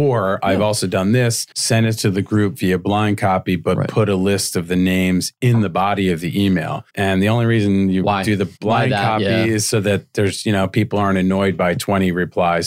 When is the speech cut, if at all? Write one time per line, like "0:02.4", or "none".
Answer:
0:01.5
0:06.9
0:08.6